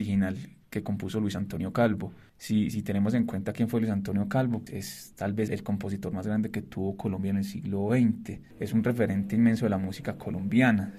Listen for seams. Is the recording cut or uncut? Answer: cut